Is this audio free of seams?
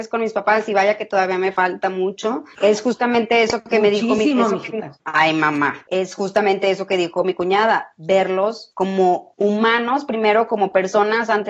yes; 0 cuts

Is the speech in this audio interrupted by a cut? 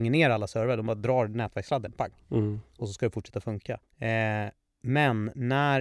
yes; 1 cut; at 3.8 s

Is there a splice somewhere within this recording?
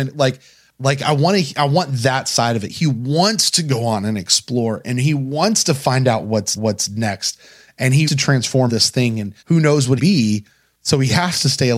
yes; 5 cuts; at 6.6 s, 8.0 s, 8.7 s, 9.4 s, 10.0 s

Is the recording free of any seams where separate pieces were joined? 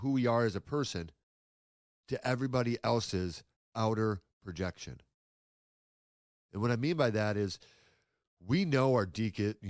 yes; 0 cuts

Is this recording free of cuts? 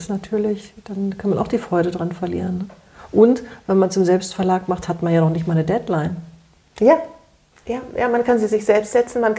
yes; 0 cuts

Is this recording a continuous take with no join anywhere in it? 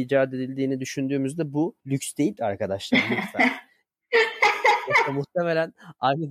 no; 2 cuts; at 1.8 s, 2.4 s

